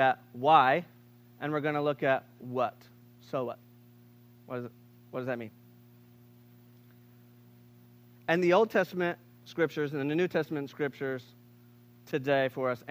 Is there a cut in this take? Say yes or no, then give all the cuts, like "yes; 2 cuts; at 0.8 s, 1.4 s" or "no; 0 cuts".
no; 0 cuts